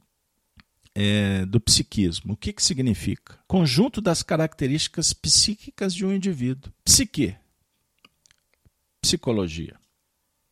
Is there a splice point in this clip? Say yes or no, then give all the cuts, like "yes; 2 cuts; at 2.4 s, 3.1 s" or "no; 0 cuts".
yes; 2 cuts; at 3.4 s, 6.8 s